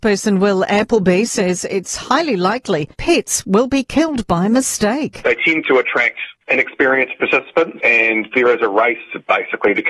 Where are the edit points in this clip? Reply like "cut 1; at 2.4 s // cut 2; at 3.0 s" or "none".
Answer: cut 1; at 2.9 s